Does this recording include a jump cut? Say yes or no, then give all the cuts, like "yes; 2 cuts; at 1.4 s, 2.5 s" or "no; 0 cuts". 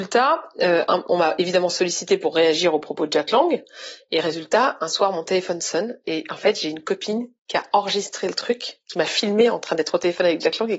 no; 0 cuts